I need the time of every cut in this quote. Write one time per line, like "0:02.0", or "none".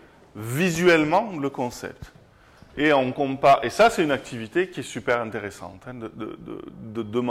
none